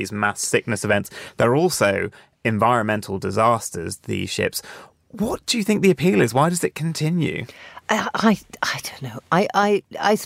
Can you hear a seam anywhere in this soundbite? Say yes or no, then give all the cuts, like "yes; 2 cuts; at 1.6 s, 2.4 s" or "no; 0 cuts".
no; 0 cuts